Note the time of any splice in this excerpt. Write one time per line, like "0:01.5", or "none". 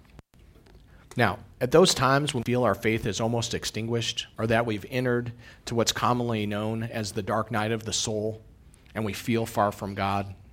0:02.4
0:04.3